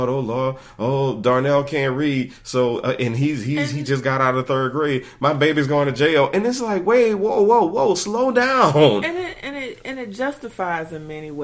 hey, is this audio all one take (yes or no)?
yes